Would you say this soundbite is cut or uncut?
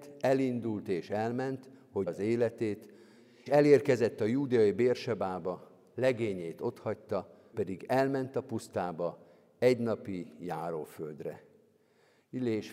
cut